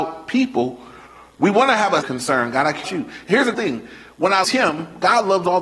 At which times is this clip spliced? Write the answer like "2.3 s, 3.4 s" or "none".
2.0 s, 2.8 s, 3.5 s, 4.4 s